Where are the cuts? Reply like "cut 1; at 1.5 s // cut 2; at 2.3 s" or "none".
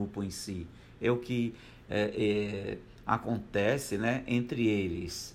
none